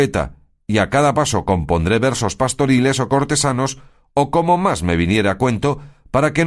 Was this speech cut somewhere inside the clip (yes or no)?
no